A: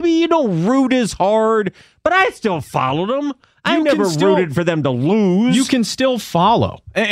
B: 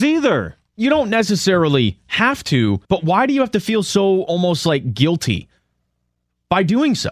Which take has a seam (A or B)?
B